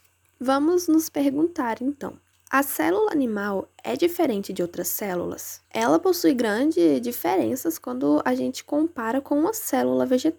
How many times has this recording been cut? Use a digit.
2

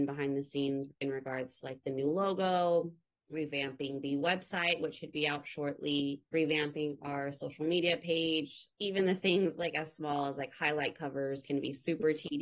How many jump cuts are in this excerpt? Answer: 3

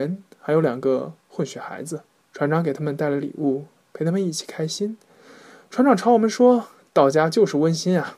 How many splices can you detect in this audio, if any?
1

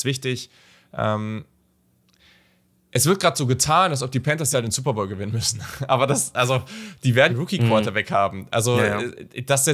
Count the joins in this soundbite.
2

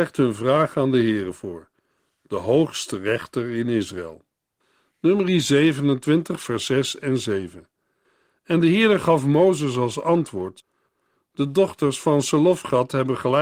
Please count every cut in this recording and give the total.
0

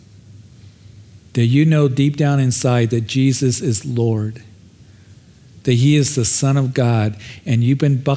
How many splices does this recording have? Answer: 0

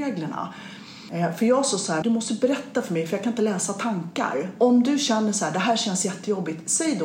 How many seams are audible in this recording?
1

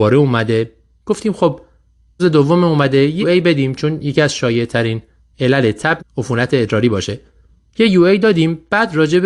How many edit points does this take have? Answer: 3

